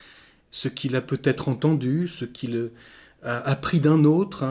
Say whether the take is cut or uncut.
uncut